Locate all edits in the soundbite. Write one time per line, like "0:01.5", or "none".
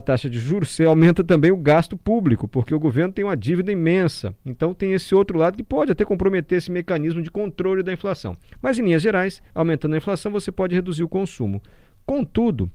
0:04.4
0:09.5